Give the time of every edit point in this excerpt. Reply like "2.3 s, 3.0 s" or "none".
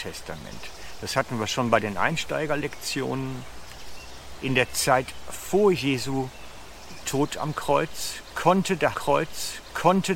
8.9 s